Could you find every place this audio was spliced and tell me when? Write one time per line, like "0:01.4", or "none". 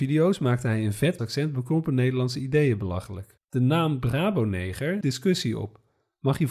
0:01.2
0:05.0